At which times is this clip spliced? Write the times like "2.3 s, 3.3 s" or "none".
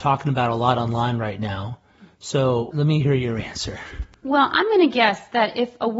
2.7 s